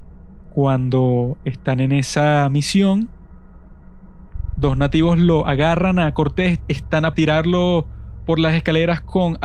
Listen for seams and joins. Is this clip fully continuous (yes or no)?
no